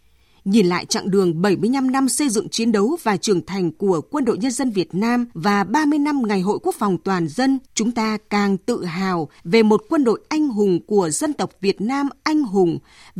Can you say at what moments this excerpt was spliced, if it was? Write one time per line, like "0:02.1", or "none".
0:05.3
0:07.7
0:09.4